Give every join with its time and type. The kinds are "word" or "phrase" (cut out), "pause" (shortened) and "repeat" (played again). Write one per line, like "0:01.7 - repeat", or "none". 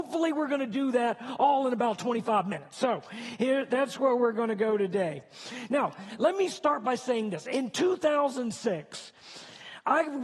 none